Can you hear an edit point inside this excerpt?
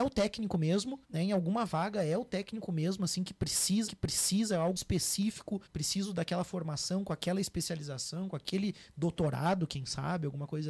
yes; 4 cuts; at 1.0 s, 3.9 s, 4.8 s, 5.7 s

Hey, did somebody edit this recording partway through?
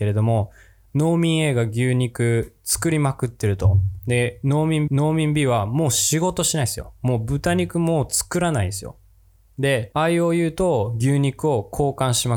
yes; 1 cut; at 4.9 s

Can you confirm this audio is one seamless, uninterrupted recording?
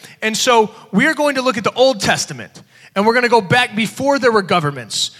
yes; 0 cuts

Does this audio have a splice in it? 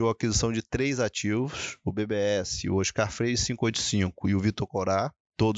no; 0 cuts

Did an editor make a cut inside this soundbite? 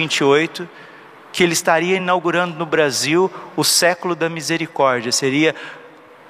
no; 0 cuts

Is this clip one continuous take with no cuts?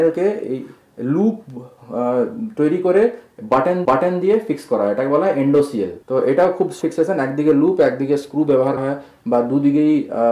no; 4 cuts; at 3.9 s, 6.0 s, 6.8 s, 8.8 s

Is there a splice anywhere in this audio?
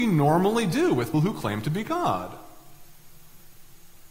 yes; 1 cut; at 1.1 s

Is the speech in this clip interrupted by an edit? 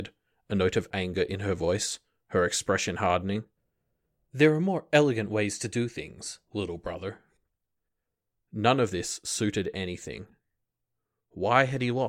no; 0 cuts

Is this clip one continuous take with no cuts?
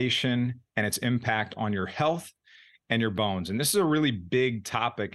yes; 0 cuts

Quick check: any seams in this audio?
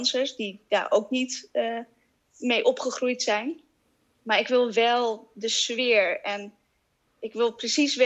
no; 0 cuts

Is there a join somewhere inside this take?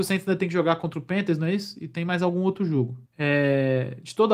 yes; 1 cut; at 3.1 s

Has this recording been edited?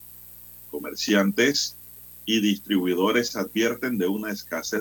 no; 0 cuts

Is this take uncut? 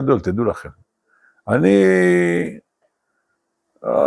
yes; 0 cuts

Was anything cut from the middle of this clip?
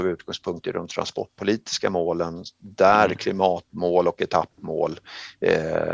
no; 0 cuts

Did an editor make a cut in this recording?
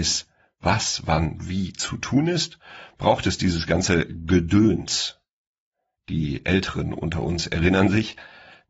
no; 0 cuts

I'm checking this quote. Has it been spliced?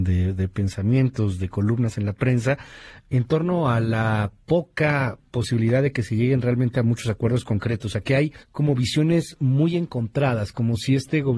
yes; 2 cuts; at 4.4 s, 8.4 s

